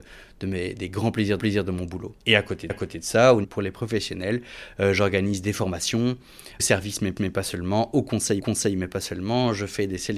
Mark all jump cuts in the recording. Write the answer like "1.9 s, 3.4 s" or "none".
1.4 s, 2.2 s, 2.7 s, 3.4 s, 6.6 s, 7.2 s, 8.4 s